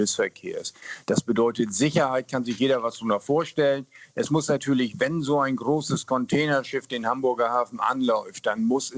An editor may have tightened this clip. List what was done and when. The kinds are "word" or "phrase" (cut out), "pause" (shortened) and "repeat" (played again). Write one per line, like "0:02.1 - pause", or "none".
none